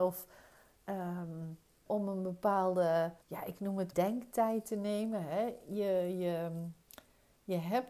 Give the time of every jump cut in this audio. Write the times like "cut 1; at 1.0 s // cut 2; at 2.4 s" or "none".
cut 1; at 1.9 s // cut 2; at 3.2 s // cut 3; at 3.9 s